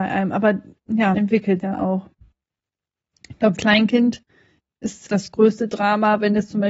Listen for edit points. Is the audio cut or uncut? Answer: cut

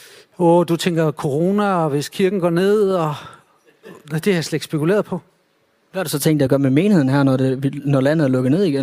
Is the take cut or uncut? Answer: uncut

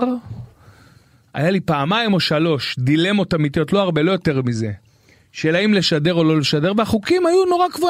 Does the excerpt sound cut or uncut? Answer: uncut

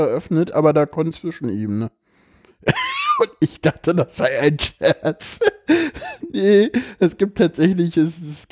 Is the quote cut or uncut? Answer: cut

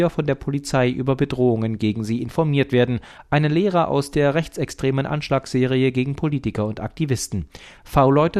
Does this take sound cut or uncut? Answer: uncut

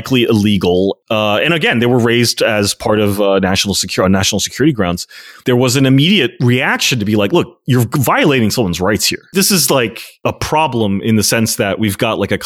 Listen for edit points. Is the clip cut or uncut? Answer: uncut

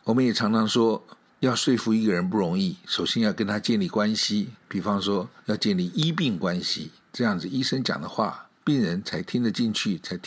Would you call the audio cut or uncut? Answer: cut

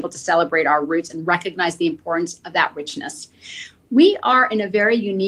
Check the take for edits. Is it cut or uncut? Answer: uncut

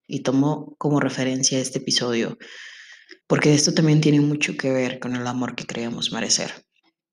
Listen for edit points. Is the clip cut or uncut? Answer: cut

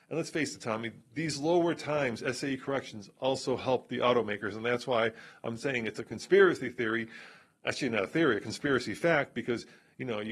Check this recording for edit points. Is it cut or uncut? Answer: uncut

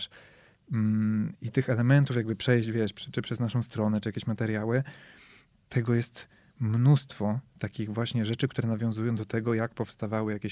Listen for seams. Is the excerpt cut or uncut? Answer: uncut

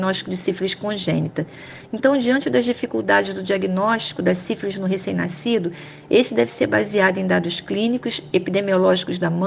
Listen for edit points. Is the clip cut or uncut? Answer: uncut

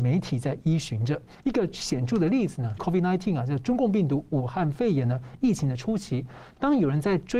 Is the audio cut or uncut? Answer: cut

